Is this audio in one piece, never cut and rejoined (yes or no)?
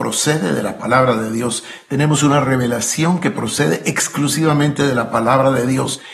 yes